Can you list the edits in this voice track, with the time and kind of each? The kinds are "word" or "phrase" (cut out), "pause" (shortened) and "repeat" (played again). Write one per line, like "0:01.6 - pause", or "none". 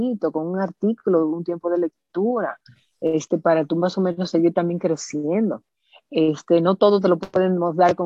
none